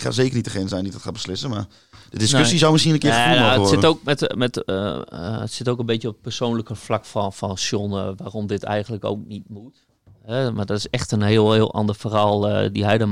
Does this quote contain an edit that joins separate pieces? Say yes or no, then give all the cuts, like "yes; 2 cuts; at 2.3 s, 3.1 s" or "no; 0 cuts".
no; 0 cuts